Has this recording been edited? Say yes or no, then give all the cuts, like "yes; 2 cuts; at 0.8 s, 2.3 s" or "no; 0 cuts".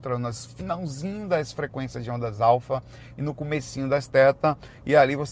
no; 0 cuts